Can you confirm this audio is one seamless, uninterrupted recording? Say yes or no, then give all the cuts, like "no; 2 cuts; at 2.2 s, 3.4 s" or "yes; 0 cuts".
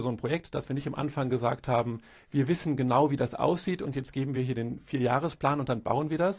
yes; 0 cuts